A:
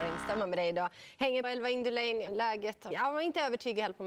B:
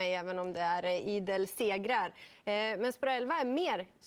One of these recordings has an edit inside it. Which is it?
A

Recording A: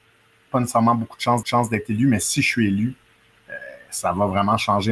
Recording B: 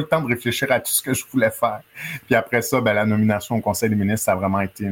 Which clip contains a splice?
A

